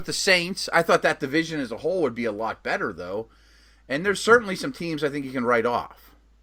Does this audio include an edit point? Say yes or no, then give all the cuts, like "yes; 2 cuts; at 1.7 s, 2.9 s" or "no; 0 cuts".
no; 0 cuts